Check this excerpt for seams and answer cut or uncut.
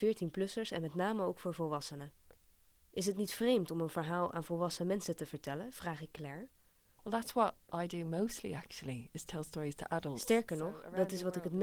uncut